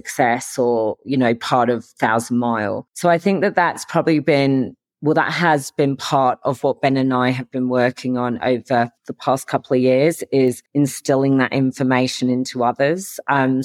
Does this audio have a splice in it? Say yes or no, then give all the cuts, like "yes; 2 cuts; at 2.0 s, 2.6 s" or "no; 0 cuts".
yes; 3 cuts; at 2.9 s, 9.0 s, 10.7 s